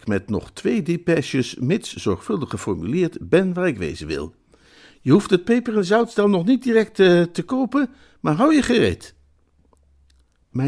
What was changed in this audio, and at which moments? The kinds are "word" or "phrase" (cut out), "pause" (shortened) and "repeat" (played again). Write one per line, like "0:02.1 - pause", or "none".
none